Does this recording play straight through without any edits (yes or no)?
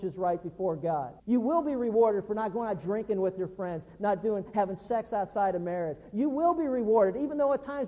no